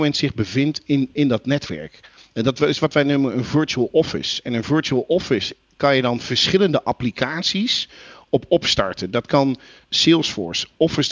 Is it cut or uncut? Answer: uncut